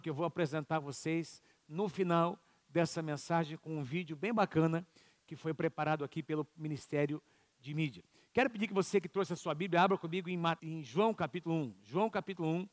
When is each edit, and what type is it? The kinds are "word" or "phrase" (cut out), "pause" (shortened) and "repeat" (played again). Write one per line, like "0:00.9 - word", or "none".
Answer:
0:10.6 - word

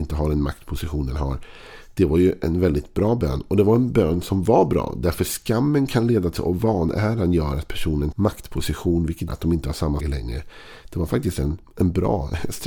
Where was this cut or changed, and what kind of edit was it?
0:06.4 - word
0:08.1 - word
0:09.3 - word
0:10.0 - word

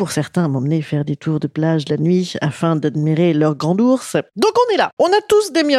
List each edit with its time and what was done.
none

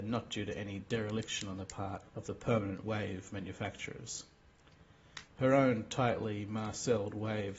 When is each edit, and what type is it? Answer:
0:02.1 - pause

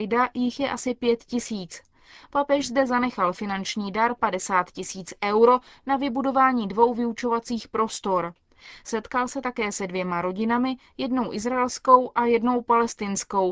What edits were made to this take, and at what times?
none

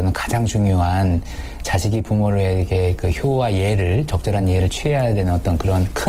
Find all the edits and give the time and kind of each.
none

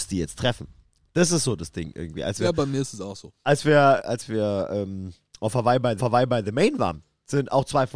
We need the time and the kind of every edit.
0:04.0 - word
0:06.0 - repeat

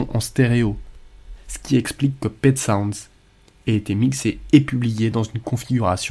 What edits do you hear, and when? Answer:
none

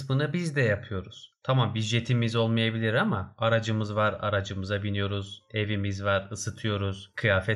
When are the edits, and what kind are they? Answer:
none

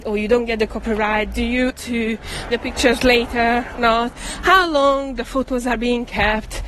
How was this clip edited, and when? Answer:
0:01.7 - word
0:02.5 - word
0:03.8 - word

